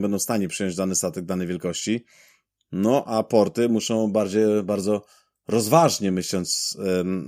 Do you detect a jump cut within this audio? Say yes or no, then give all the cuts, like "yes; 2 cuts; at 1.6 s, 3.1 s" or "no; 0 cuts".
no; 0 cuts